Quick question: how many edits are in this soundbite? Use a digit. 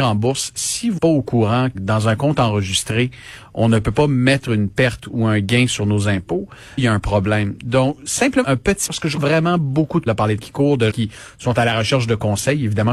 9